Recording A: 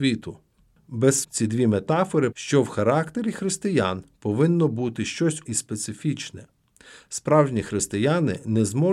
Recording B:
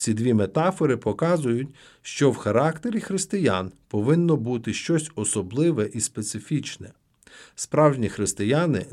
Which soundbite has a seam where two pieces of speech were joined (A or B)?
A